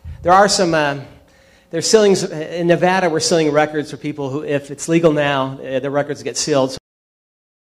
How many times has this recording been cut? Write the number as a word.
zero